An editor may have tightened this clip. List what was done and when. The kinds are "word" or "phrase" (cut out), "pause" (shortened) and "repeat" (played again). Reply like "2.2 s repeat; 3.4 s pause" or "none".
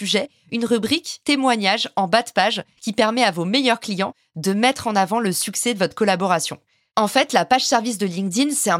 none